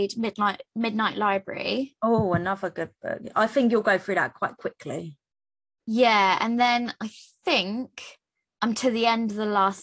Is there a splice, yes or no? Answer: no